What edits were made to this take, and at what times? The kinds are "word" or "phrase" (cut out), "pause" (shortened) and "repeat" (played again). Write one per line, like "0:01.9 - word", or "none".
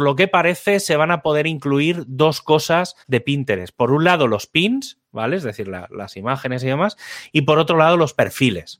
0:03.0 - pause